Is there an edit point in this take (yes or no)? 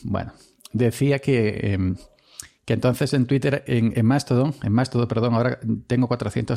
no